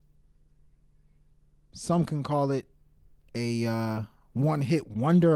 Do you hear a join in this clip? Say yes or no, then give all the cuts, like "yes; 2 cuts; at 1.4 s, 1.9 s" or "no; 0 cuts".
no; 0 cuts